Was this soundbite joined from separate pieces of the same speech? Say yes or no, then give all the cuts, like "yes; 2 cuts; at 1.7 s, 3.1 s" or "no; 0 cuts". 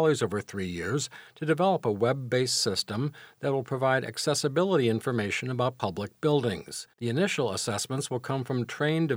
yes; 1 cut; at 6.9 s